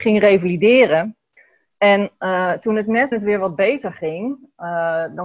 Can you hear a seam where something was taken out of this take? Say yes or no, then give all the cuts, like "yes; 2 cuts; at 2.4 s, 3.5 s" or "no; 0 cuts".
yes; 2 cuts; at 1.4 s, 3.1 s